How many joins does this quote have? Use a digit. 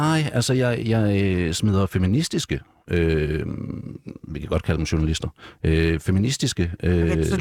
0